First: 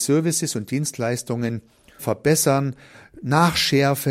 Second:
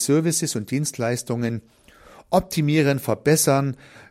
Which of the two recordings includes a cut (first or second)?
first